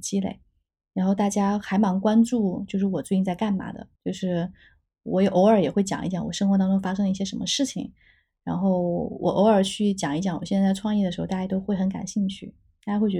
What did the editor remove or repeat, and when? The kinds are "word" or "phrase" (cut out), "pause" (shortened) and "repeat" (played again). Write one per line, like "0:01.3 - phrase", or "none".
0:03.9 - pause